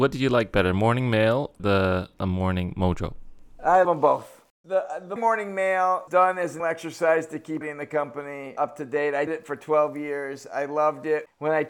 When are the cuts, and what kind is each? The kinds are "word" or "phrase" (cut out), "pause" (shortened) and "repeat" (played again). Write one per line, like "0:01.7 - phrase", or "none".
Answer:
0:01.6 - word
0:03.8 - word
0:05.2 - word
0:06.1 - word
0:06.6 - word
0:07.6 - word
0:08.6 - word
0:09.3 - word